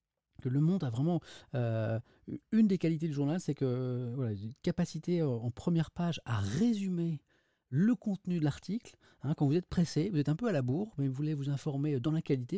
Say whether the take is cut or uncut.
uncut